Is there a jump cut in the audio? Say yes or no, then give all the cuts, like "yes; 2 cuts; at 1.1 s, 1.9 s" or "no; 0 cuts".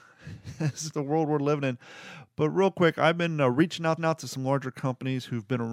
yes; 2 cuts; at 0.9 s, 4.0 s